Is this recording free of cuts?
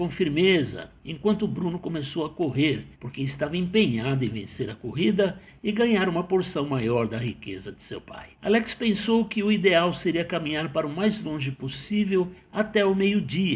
no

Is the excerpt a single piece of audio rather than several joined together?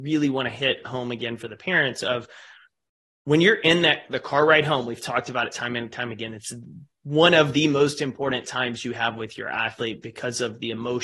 yes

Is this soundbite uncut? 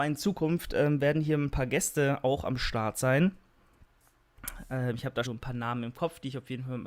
no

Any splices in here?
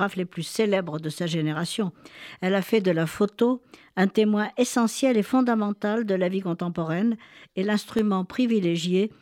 no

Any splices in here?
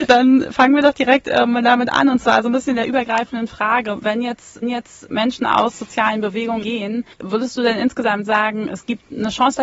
yes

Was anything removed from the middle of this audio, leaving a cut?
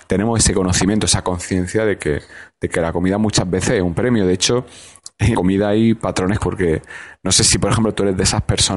yes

